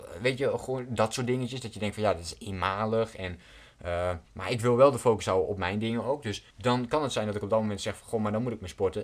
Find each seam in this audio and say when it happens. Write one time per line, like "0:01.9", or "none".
0:04.3
0:06.5